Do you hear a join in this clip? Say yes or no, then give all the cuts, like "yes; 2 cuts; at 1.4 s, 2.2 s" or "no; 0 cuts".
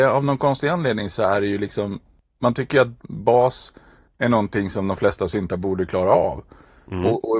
no; 0 cuts